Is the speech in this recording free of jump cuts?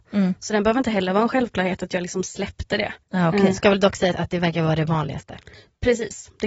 no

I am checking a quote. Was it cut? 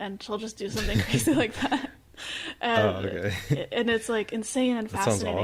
no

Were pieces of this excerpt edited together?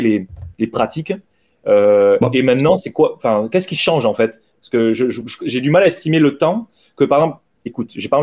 no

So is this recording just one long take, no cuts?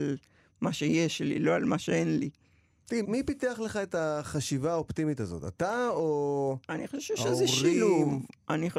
no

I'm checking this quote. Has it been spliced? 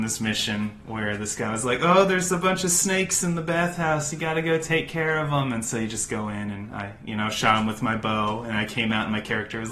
no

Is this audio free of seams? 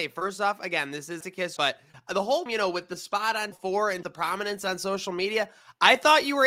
no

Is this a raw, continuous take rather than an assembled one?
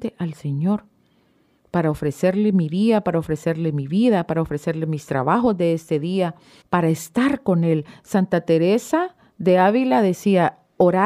no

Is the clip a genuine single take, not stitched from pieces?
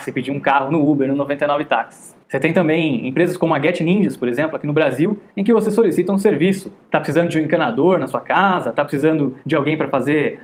no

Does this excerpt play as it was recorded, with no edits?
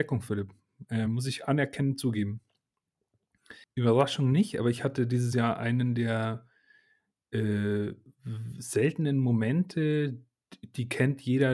yes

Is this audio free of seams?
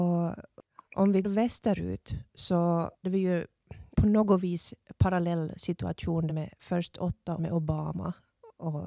no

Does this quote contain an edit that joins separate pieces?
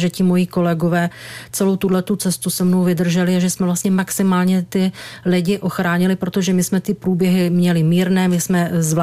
no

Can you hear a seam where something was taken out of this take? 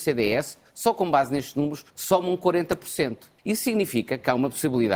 yes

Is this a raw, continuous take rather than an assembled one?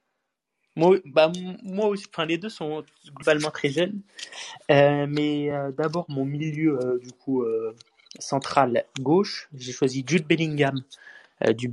yes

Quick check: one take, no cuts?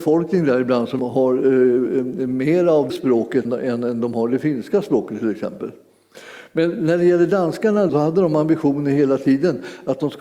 no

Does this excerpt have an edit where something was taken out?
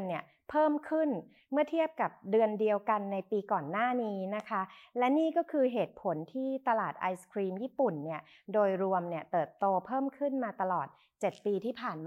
no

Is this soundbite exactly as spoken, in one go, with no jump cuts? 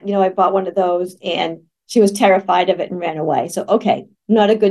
yes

